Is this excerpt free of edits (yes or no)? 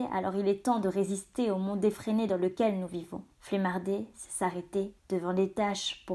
no